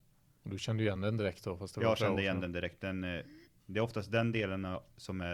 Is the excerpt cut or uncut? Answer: uncut